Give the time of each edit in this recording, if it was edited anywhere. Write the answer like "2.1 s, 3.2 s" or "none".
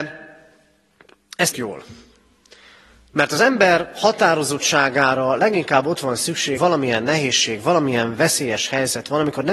1.5 s, 6.6 s